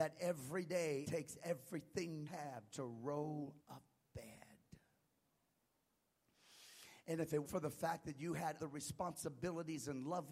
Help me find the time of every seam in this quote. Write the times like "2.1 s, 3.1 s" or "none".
1.0 s, 2.3 s, 2.7 s, 3.6 s, 7.5 s, 8.6 s